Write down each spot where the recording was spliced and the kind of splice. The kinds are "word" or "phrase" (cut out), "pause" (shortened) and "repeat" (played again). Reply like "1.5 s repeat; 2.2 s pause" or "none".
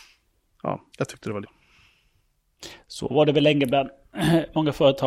0.9 s pause; 1.4 s phrase